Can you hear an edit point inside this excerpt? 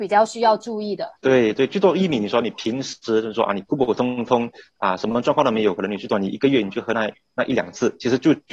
no; 0 cuts

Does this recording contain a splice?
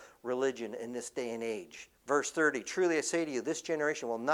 yes; 1 cut; at 2.0 s

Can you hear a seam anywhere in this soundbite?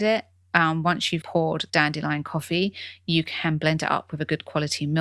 yes; 2 cuts; at 1.2 s, 1.7 s

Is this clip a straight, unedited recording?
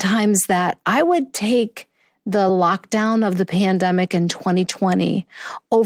yes; 0 cuts

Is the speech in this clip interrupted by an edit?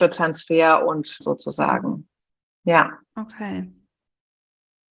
yes; 1 cut; at 1.2 s

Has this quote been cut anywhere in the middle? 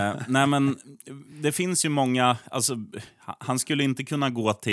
no; 0 cuts

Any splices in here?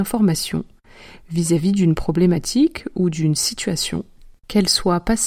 no; 0 cuts

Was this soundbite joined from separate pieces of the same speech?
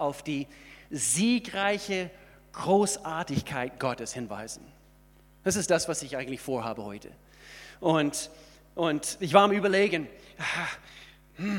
no; 0 cuts

